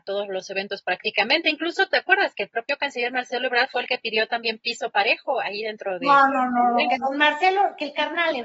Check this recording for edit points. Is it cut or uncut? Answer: uncut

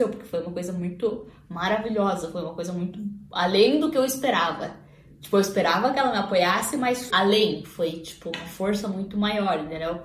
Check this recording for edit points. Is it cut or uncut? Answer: cut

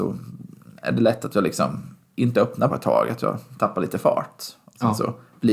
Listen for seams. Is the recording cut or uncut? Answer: cut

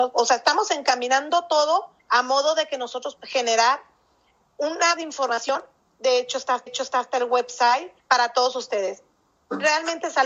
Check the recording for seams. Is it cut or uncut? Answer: cut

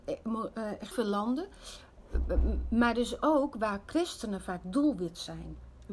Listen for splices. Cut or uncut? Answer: cut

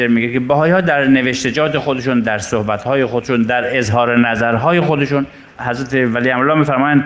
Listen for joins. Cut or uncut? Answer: uncut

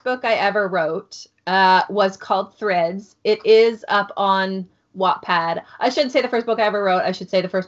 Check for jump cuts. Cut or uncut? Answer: uncut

